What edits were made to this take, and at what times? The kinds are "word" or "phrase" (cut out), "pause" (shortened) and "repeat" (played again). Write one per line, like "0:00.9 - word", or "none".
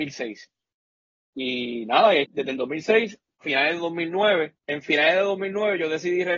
0:02.2 - word
0:03.4 - word
0:04.6 - pause